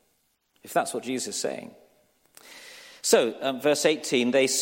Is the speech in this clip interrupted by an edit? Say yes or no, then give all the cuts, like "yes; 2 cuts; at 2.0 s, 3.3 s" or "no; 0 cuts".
no; 0 cuts